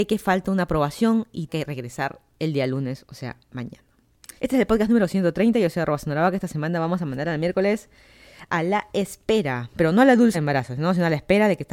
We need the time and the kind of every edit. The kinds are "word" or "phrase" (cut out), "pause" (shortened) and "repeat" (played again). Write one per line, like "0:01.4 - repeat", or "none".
0:01.5 - word
0:04.4 - pause
0:10.3 - word

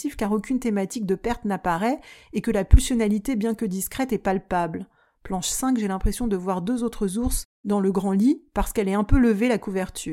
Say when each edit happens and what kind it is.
none

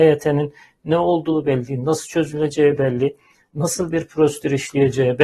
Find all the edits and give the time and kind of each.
none

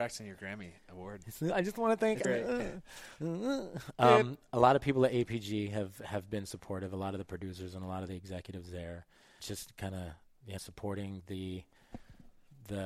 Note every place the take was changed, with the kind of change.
0:02.2 - word
0:09.4 - word
0:10.6 - word

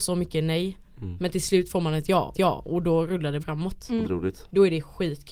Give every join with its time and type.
0:02.3 - repeat
0:03.4 - word
0:04.0 - phrase

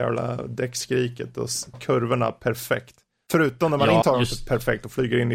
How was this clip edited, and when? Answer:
0:01.7 - word
0:04.0 - word

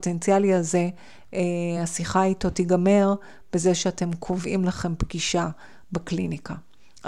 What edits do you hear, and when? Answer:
none

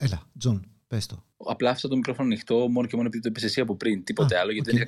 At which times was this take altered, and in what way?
0:01.3 - pause

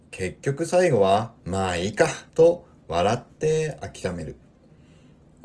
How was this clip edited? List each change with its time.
0:01.4 - pause
0:02.3 - pause

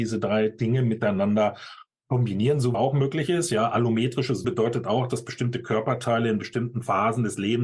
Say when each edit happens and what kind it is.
0:02.7 - phrase
0:04.4 - word

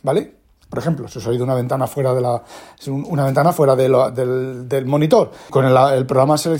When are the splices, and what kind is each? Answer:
0:05.5 - word

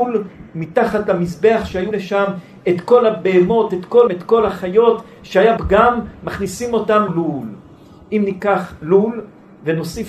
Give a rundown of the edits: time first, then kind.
0:01.9 - word
0:04.1 - word
0:05.6 - word
0:07.1 - word

